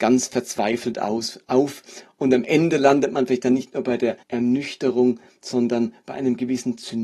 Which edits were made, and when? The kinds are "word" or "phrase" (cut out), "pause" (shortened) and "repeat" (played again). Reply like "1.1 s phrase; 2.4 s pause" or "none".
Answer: 4.2 s pause